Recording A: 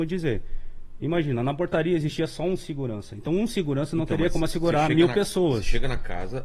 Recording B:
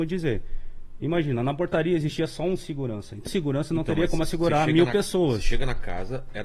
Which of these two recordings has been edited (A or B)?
B